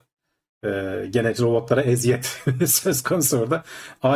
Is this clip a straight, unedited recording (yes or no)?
yes